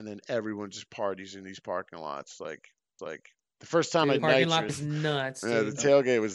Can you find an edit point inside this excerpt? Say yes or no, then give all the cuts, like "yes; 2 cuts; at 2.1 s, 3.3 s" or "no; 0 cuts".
yes; 3 cuts; at 3.0 s, 4.2 s, 4.7 s